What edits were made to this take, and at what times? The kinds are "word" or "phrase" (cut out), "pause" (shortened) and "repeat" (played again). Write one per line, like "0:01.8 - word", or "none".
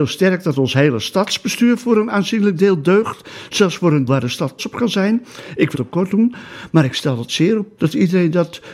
0:04.1 - word
0:04.6 - word
0:05.7 - word
0:07.3 - word
0:07.8 - word